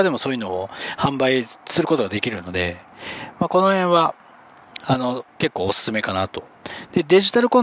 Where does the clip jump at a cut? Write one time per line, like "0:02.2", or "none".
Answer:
0:05.3